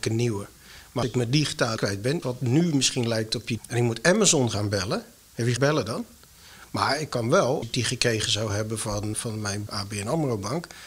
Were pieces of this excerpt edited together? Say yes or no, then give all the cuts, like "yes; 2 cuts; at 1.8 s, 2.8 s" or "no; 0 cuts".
yes; 8 cuts; at 1.0 s, 1.8 s, 2.2 s, 3.6 s, 5.6 s, 7.6 s, 9.1 s, 9.7 s